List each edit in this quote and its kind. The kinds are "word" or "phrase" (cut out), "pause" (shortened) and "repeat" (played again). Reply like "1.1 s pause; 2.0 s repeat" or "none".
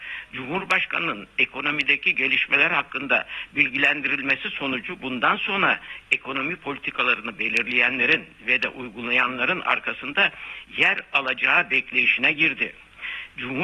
none